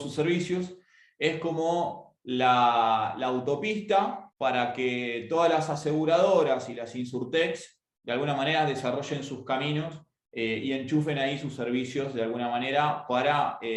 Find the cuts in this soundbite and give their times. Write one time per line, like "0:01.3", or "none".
0:04.3